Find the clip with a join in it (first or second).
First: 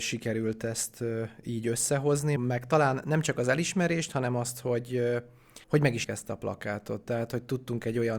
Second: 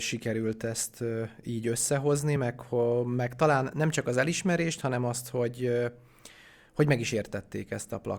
first